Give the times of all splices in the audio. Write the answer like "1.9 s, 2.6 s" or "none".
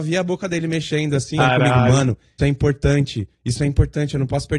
1.4 s, 2.4 s, 3.3 s